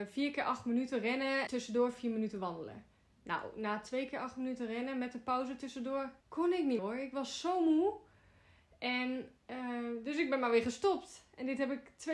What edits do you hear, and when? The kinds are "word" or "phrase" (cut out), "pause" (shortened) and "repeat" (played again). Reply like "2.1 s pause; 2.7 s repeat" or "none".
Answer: 1.5 s phrase; 6.2 s pause; 6.8 s word; 9.4 s pause